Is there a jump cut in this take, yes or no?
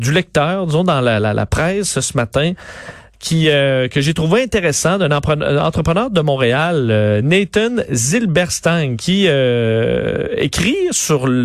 no